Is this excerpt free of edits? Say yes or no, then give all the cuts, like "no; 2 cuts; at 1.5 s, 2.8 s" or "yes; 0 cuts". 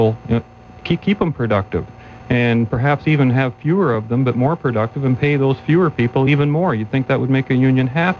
yes; 0 cuts